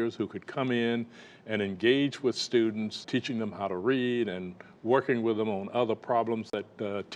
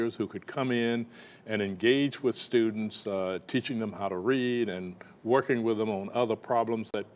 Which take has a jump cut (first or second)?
first